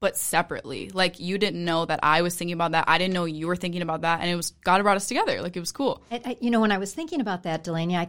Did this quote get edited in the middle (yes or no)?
no